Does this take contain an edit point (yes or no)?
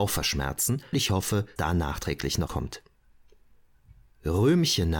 yes